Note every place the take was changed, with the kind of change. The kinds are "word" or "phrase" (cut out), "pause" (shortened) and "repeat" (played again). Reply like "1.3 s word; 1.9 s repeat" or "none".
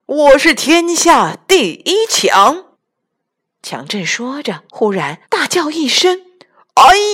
2.7 s pause; 4.7 s pause; 5.2 s pause